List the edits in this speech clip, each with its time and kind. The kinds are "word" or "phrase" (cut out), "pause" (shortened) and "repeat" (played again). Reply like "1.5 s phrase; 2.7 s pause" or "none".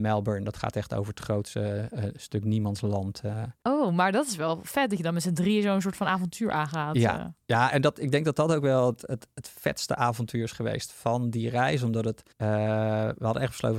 12.3 s pause